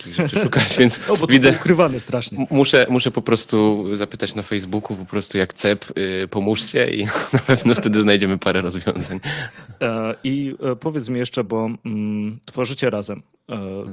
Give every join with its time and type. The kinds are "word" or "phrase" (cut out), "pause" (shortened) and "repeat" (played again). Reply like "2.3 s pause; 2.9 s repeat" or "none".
none